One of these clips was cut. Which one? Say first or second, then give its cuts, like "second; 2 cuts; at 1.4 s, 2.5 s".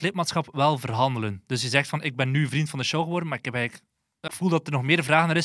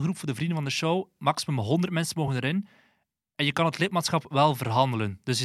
first; 1 cut; at 4.3 s